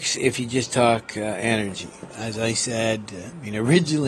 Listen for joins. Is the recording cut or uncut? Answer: uncut